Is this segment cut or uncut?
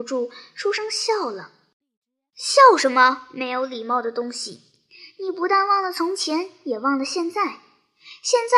uncut